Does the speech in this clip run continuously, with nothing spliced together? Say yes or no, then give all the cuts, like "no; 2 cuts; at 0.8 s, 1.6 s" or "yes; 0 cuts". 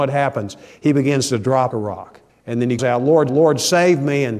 no; 4 cuts; at 1.7 s, 2.3 s, 2.8 s, 3.3 s